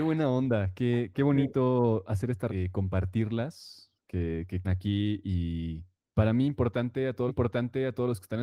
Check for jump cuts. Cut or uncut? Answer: cut